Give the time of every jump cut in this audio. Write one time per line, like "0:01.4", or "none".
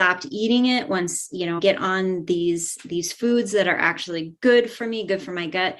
0:01.6